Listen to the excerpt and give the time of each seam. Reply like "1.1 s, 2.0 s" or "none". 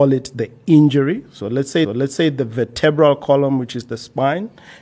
1.8 s